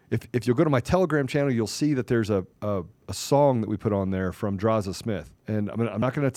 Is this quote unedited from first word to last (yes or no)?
no